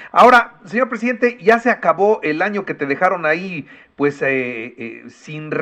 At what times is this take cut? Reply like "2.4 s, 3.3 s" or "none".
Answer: none